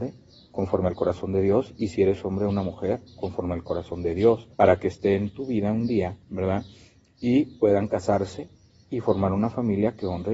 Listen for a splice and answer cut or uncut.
cut